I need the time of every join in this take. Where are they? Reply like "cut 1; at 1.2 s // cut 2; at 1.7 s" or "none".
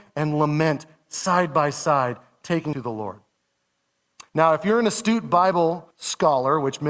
cut 1; at 2.7 s // cut 2; at 4.3 s // cut 3; at 5.9 s